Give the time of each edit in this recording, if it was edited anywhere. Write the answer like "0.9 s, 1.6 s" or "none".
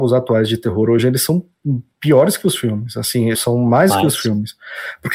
3.3 s, 3.9 s